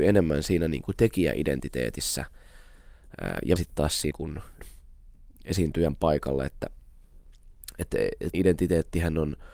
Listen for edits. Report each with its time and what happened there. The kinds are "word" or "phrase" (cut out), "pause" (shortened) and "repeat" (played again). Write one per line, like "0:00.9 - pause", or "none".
0:03.6 - word
0:04.1 - word
0:04.6 - word
0:08.3 - word